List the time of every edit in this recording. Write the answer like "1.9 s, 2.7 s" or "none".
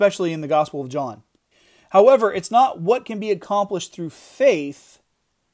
1.5 s